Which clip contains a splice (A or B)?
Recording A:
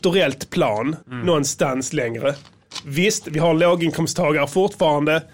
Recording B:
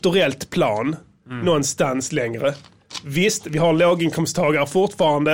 A